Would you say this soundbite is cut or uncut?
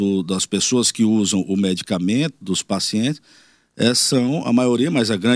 uncut